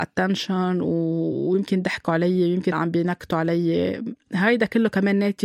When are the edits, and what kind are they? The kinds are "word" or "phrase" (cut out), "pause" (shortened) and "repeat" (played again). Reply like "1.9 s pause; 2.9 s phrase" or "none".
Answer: 2.7 s word

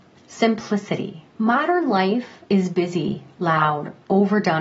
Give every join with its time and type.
1.3 s pause; 2.4 s pause

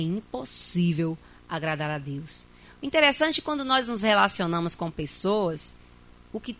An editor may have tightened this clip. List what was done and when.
none

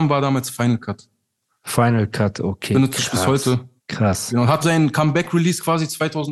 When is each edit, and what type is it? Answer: 3.8 s pause; 4.6 s word

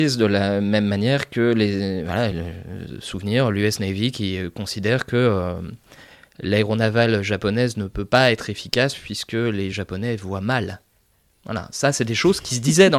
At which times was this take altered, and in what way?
none

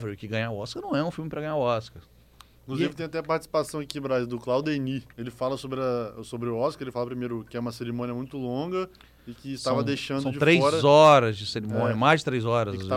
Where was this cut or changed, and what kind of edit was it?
5.1 s pause

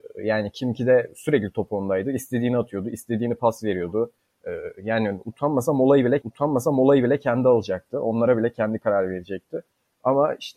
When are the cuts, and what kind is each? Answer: 6.2 s repeat

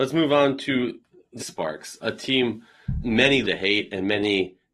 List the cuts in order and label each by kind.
1.4 s word; 2.0 s word; 3.0 s word; 3.4 s word

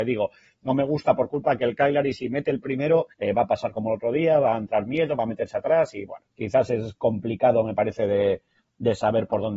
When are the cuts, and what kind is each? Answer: 3.1 s pause; 6.3 s pause

